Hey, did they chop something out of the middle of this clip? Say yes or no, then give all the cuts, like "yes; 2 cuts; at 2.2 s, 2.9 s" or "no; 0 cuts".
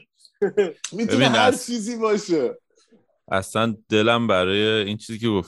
no; 0 cuts